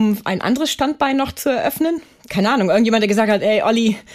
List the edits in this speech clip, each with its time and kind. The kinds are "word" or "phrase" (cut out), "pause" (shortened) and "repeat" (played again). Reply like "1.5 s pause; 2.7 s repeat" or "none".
none